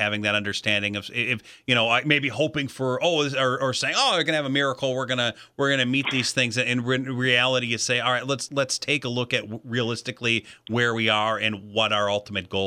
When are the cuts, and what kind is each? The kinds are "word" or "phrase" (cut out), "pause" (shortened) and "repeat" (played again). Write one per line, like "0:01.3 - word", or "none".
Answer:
0:08.5 - word

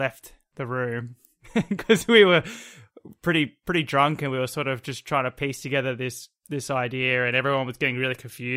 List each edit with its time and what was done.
0:06.4 - pause

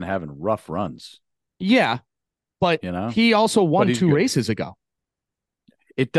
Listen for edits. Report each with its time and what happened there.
0:01.3 - pause

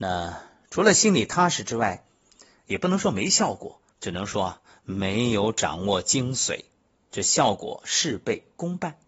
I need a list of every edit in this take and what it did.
0:03.9 - pause

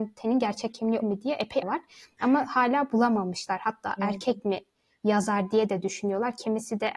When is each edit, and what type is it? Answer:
0:01.0 - word
0:01.6 - phrase

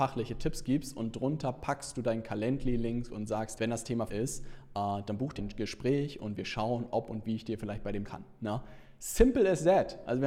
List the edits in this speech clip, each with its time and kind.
0:03.6 - word
0:04.1 - phrase
0:05.4 - word
0:08.0 - phrase

